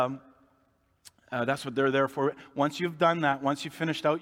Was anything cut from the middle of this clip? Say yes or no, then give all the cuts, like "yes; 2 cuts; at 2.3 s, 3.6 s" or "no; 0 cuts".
no; 0 cuts